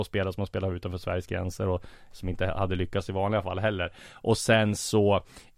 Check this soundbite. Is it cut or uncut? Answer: uncut